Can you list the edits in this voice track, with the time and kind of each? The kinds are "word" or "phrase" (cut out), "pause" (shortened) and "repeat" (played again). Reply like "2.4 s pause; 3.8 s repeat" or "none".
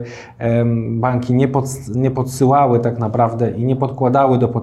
none